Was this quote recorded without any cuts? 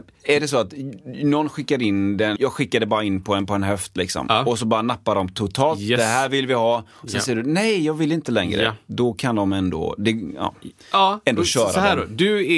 no; 1 cut; at 2.4 s

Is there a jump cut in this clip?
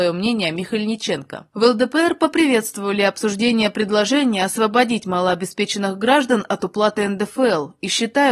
no; 0 cuts

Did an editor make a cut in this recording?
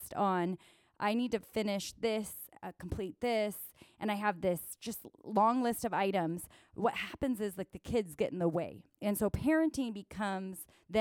no; 0 cuts

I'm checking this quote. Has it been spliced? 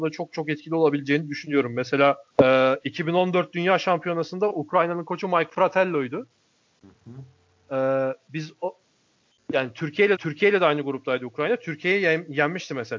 yes; 2 cuts; at 2.3 s, 10.2 s

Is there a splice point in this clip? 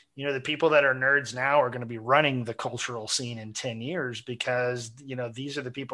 no; 0 cuts

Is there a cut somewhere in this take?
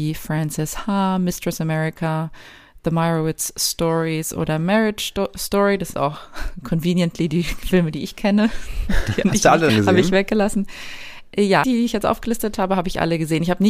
yes; 4 cuts; at 5.9 s, 9.2 s, 9.7 s, 11.6 s

